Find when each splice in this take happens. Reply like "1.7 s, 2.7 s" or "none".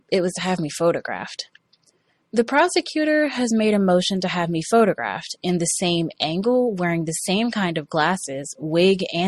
none

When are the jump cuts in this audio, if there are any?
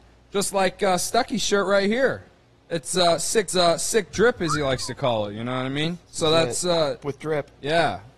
3.5 s, 6.0 s, 7.0 s

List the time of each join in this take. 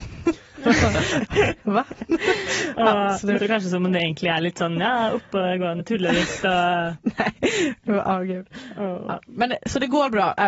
3.4 s, 5.8 s

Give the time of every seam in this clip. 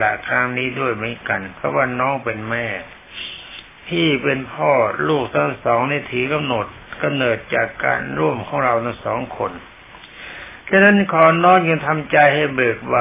10.6 s

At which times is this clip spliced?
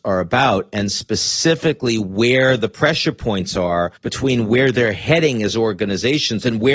4.0 s

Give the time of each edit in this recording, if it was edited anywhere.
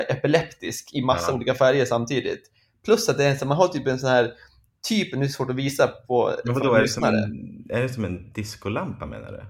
none

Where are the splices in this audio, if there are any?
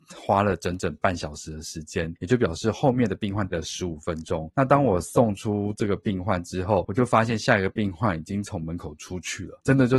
3.5 s

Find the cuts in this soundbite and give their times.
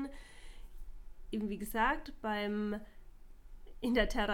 none

